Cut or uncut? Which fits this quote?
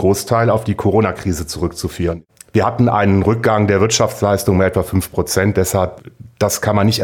uncut